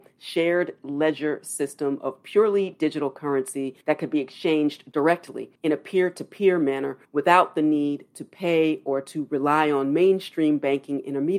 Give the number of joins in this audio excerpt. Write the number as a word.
three